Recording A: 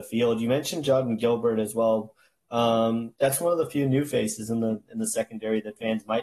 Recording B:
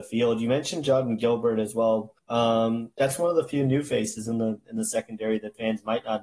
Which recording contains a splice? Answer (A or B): B